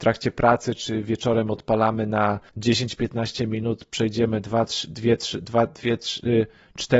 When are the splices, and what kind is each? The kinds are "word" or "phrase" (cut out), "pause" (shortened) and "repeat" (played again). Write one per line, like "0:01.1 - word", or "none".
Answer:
0:02.5 - pause